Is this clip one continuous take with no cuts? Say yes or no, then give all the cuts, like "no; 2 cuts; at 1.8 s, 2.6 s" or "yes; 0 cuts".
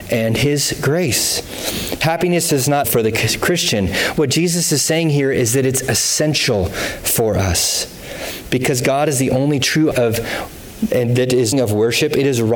no; 4 cuts; at 2.5 s, 2.8 s, 9.9 s, 11.5 s